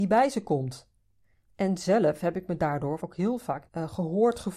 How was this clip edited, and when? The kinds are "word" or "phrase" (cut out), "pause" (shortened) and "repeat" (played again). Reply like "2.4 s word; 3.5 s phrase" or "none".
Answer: 1.2 s pause; 3.0 s word; 3.7 s word